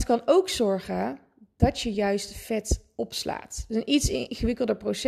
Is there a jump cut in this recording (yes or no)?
no